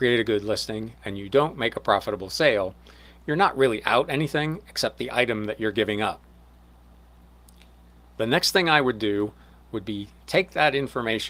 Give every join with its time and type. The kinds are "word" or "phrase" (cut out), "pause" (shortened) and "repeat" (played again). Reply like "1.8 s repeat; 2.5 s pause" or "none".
none